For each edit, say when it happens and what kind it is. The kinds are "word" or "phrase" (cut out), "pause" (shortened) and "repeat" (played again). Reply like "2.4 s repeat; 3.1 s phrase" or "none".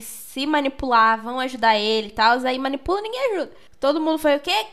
none